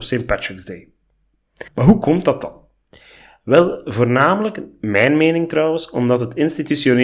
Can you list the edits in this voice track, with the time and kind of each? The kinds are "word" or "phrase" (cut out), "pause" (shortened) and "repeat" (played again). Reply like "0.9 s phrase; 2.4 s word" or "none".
1.7 s pause

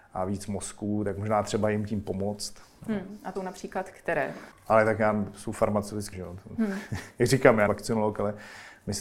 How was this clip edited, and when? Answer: 3.4 s word; 4.5 s pause; 6.1 s word; 7.7 s word

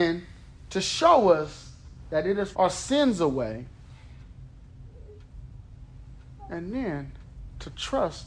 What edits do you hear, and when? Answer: 2.5 s phrase

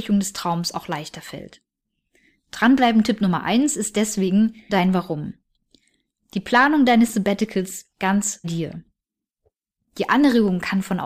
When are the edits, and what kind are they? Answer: 4.7 s word; 7.9 s word; 8.4 s word

